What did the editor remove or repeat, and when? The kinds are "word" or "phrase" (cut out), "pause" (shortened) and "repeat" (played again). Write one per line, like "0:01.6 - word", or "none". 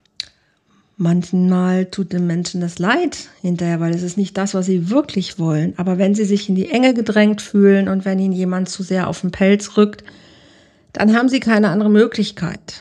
none